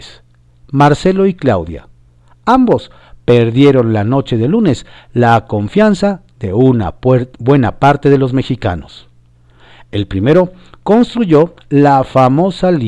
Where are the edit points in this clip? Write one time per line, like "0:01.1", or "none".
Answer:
none

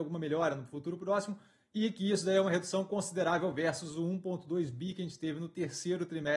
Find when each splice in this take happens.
none

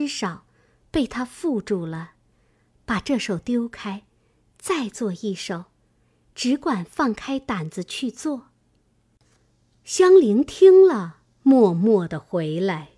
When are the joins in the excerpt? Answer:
none

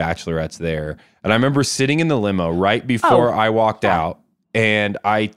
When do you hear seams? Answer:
none

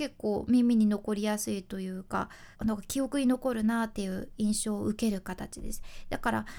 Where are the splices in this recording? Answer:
0:02.5

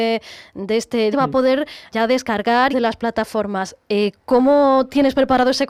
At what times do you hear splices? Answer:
0:01.1
0:01.9
0:02.7

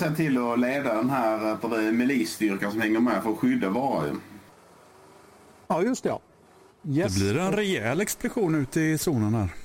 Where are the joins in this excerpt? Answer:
none

